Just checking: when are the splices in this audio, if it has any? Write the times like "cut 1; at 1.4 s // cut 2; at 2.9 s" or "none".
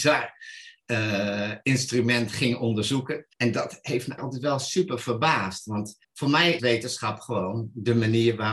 cut 1; at 3.3 s // cut 2; at 4.2 s // cut 3; at 6.0 s // cut 4; at 6.6 s